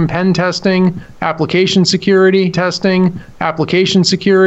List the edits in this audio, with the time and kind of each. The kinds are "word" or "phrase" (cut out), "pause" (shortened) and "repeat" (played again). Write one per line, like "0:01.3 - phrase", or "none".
0:02.5 - repeat